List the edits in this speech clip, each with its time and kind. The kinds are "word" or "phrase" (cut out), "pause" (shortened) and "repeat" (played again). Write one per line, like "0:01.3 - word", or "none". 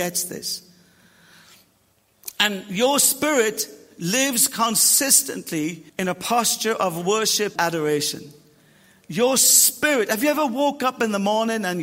0:05.9 - pause
0:07.6 - word